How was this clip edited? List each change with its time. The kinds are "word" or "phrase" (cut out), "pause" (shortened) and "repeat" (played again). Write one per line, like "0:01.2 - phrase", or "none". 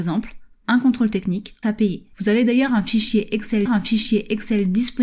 0:01.6 - phrase
0:02.1 - pause
0:03.7 - repeat

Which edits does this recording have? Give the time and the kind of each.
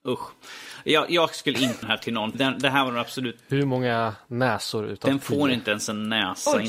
0:01.8 - word
0:02.3 - word

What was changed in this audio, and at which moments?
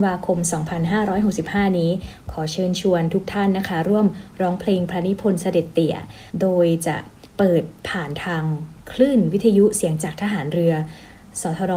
0:06.3 - pause
0:07.3 - pause
0:07.8 - pause

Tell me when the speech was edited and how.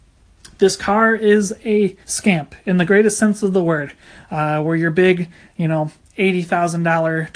0:02.0 - pause

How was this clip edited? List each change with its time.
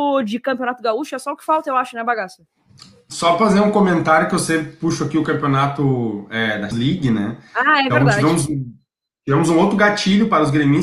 0:06.7 - word

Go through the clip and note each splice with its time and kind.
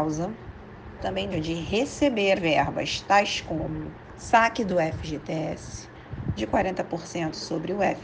0:01.0 - phrase
0:01.3 - word
0:02.4 - word
0:04.1 - phrase
0:06.4 - word

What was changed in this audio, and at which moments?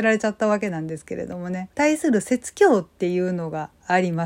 0:01.7 - pause

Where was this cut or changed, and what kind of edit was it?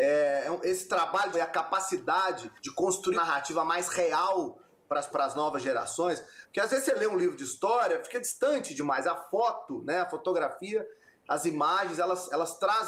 0:01.3 - phrase
0:02.6 - pause
0:03.1 - word
0:05.1 - word

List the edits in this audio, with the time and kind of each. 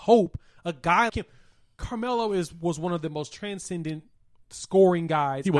0:01.1 - word

